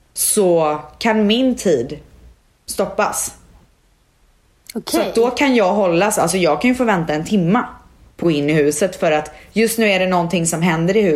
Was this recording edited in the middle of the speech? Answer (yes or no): yes